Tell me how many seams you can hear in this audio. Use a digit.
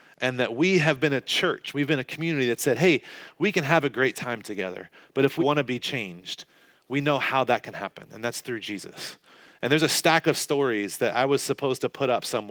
1